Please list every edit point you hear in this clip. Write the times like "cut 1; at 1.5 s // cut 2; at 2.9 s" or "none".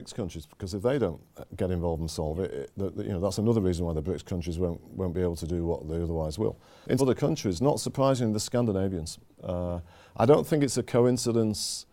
cut 1; at 7.0 s

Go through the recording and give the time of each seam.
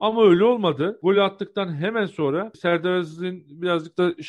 none

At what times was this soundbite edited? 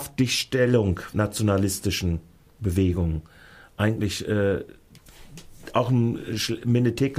cut 1; at 1.1 s // cut 2; at 2.6 s

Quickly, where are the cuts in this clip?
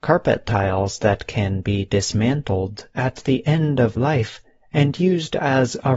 cut 1; at 4.0 s

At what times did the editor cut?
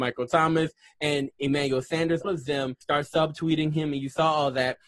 cut 1; at 2.2 s // cut 2; at 2.8 s

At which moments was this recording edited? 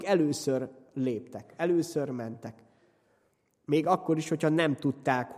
none

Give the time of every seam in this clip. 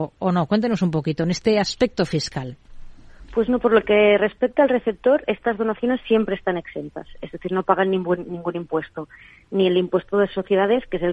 none

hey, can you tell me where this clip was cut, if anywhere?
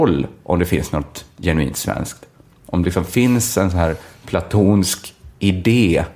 none

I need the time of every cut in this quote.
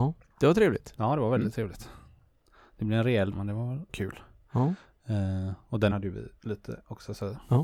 cut 1; at 3.3 s // cut 2; at 3.9 s // cut 3; at 5.9 s // cut 4; at 6.4 s

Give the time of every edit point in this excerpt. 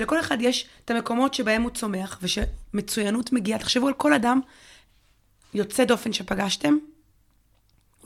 none

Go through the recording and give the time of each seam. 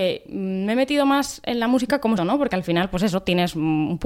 cut 1; at 2.2 s

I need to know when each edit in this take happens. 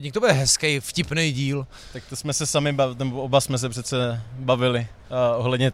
none

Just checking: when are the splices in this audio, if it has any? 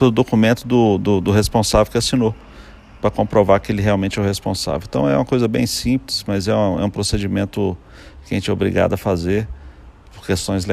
none

